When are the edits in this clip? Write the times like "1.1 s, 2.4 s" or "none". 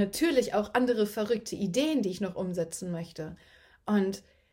none